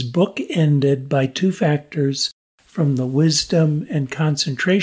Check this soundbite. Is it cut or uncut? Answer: uncut